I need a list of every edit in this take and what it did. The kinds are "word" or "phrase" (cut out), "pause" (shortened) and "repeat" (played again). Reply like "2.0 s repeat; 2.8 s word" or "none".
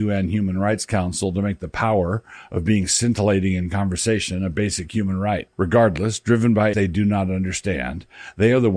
5.5 s pause; 6.7 s word